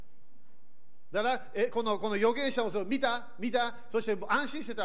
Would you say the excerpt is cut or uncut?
uncut